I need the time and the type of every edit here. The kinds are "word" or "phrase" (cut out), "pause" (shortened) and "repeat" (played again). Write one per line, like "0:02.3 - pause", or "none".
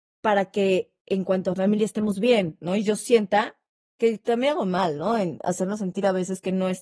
none